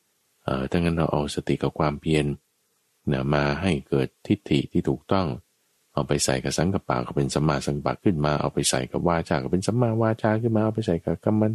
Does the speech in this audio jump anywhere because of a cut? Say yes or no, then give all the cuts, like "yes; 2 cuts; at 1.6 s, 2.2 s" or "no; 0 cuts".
no; 0 cuts